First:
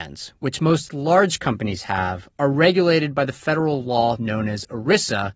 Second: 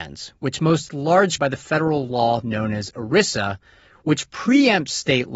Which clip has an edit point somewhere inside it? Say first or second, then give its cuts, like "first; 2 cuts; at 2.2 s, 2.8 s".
second; 1 cut; at 1.4 s